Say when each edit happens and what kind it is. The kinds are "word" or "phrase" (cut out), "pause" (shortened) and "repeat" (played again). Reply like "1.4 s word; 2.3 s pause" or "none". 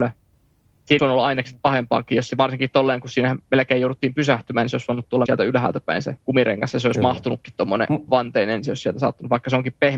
1.0 s word; 5.3 s word; 6.2 s pause; 8.1 s word